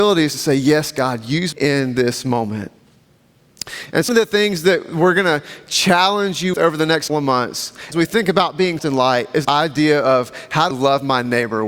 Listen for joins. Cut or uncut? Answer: cut